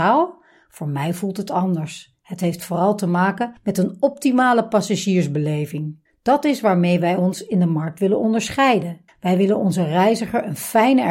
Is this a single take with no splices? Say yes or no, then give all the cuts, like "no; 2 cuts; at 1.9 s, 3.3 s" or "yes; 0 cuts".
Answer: no; 3 cuts; at 3.6 s, 6.1 s, 9.1 s